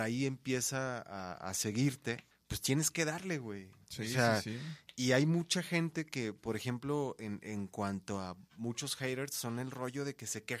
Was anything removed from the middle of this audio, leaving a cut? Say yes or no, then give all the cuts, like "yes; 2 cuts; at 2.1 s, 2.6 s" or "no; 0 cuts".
yes; 2 cuts; at 2.3 s, 8.5 s